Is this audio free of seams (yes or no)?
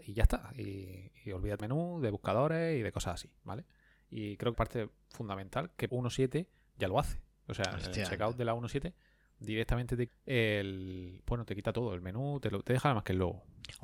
no